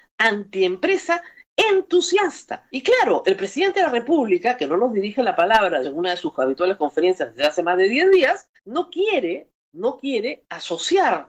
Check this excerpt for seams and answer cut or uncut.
cut